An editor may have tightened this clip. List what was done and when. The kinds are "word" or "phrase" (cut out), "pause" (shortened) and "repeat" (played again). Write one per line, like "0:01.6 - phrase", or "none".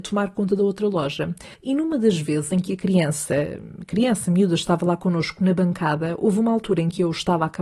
0:01.5 - pause